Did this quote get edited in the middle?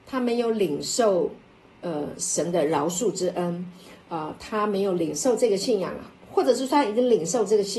no; 0 cuts

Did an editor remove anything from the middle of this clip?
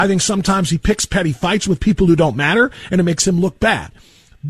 no; 0 cuts

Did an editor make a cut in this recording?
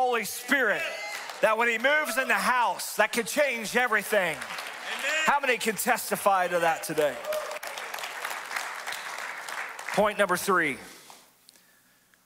no; 0 cuts

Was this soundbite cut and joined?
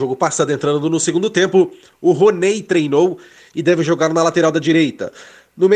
no; 0 cuts

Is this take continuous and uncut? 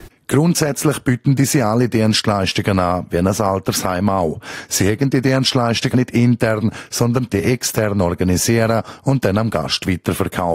no; 2 cuts; at 5.9 s, 7.3 s

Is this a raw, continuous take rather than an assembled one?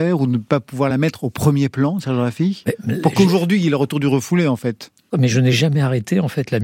yes; 0 cuts

